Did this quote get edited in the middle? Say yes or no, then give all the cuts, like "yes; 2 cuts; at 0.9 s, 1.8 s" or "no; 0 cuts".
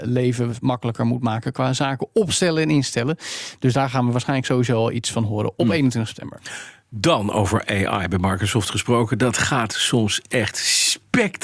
no; 0 cuts